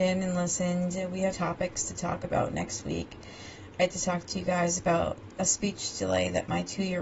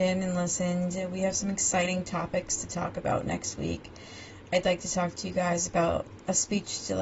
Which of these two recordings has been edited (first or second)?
first